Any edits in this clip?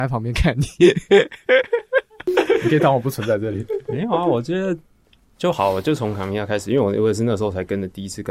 no; 0 cuts

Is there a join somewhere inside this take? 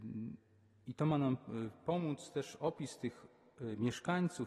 no; 0 cuts

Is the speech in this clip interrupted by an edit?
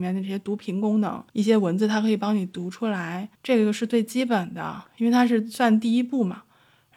yes; 3 cuts; at 1.3 s, 3.3 s, 4.9 s

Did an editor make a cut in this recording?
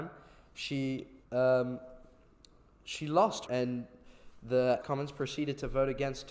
yes; 3 cuts; at 1.2 s, 3.5 s, 4.8 s

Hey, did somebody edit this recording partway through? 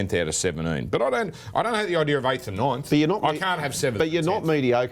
no; 0 cuts

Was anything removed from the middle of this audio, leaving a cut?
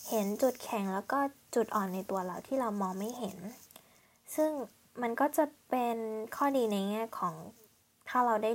no; 0 cuts

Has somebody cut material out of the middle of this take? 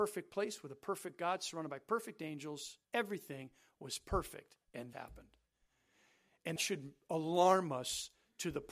yes; 3 cuts; at 2.8 s, 4.9 s, 6.6 s

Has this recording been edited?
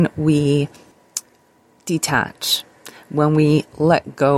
no; 0 cuts

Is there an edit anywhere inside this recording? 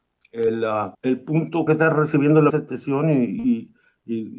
yes; 3 cuts; at 0.9 s, 1.7 s, 2.5 s

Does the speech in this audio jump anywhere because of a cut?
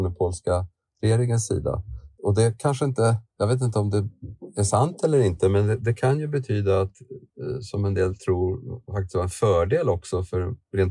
no; 0 cuts

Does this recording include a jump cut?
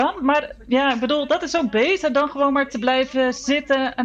no; 0 cuts

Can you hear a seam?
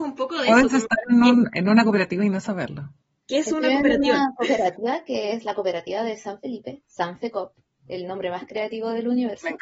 no; 0 cuts

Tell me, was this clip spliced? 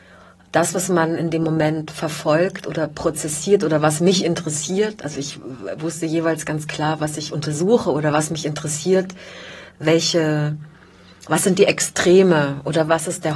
no; 0 cuts

